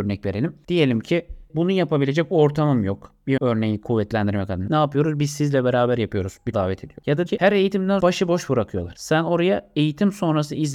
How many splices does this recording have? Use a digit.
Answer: 5